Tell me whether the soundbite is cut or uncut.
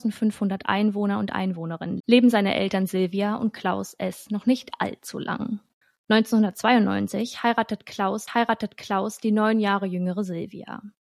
cut